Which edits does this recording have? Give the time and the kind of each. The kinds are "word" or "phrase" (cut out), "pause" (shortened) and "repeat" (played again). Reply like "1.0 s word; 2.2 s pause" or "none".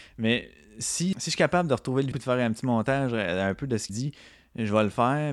1.1 s word; 2.1 s word; 3.9 s word